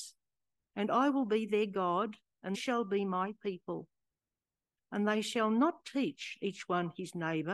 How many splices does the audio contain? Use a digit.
1